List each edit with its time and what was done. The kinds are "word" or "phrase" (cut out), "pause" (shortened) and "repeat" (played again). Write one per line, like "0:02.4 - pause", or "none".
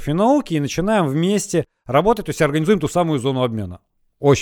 none